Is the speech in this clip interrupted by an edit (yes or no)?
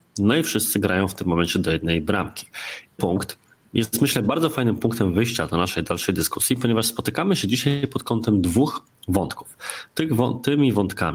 yes